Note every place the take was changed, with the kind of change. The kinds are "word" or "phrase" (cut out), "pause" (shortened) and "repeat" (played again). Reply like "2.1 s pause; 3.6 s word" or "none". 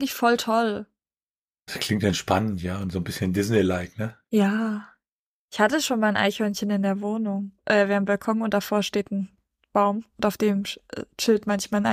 4.2 s pause; 7.6 s pause